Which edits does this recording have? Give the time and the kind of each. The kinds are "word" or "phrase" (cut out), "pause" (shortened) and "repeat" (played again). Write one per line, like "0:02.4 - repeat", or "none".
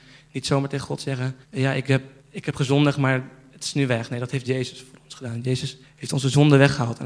0:01.4 - pause
0:02.2 - pause
0:05.8 - pause